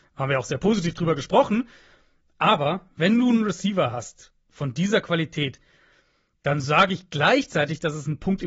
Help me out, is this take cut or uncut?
uncut